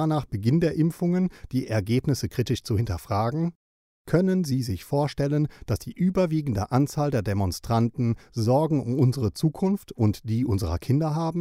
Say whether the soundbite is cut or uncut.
uncut